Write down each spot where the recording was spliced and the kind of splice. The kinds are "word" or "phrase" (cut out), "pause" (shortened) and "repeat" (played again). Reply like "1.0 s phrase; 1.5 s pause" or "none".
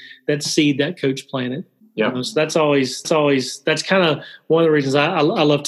1.8 s pause; 3.0 s repeat